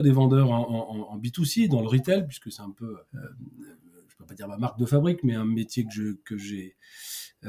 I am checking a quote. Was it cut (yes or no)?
yes